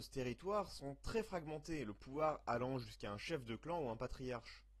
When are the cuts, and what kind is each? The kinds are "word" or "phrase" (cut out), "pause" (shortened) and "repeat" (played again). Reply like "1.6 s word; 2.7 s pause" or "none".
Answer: none